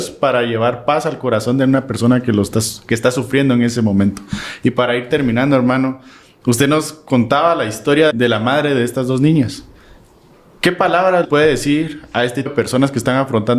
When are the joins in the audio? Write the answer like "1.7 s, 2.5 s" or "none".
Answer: 8.1 s, 11.2 s, 12.5 s